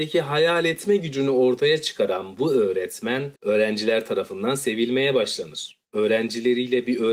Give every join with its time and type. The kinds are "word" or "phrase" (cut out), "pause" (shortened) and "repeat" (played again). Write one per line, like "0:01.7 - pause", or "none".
0:03.4 - pause
0:05.8 - pause